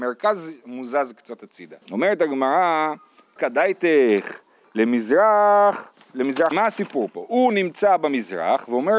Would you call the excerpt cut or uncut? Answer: cut